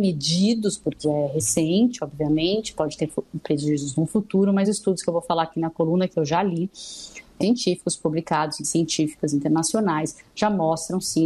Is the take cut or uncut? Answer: cut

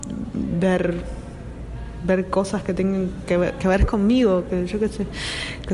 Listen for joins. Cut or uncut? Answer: uncut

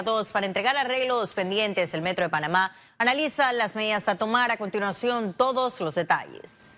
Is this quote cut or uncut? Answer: uncut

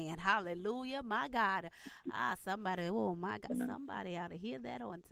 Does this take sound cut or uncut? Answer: uncut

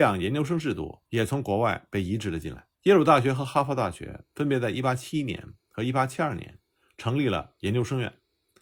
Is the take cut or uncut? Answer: cut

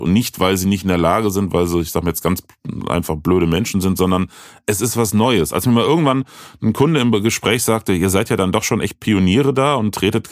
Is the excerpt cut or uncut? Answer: uncut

